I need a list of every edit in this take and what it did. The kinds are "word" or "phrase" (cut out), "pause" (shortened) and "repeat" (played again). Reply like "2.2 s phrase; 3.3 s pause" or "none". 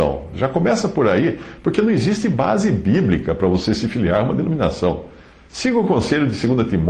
none